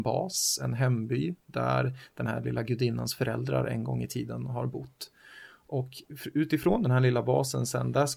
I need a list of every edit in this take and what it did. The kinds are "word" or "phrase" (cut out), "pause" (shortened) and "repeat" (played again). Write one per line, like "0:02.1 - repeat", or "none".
none